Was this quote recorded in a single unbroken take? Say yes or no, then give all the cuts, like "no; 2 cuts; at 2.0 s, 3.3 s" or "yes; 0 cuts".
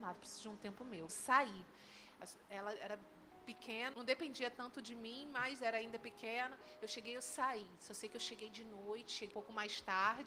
no; 3 cuts; at 1.1 s, 3.9 s, 9.3 s